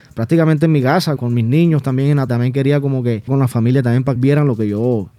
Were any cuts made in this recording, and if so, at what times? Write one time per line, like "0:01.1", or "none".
0:01.2
0:02.3
0:03.3
0:04.2